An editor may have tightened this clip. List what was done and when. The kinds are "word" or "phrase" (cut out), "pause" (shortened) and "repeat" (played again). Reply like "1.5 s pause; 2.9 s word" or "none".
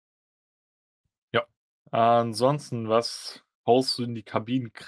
1.6 s pause; 3.5 s pause